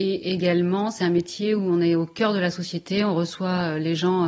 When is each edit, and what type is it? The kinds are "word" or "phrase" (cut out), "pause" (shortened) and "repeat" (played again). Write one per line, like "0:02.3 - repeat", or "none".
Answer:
none